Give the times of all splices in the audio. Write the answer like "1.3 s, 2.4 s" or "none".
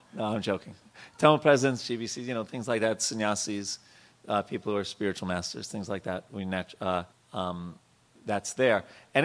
7.1 s